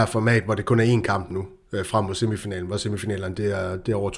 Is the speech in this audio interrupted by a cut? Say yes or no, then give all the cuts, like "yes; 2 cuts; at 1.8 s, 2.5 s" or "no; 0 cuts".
no; 0 cuts